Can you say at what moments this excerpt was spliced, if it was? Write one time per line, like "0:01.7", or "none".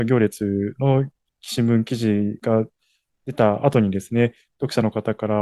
none